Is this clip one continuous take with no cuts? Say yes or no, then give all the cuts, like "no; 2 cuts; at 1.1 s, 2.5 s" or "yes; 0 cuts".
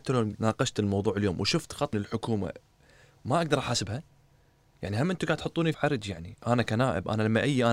no; 2 cuts; at 1.9 s, 5.7 s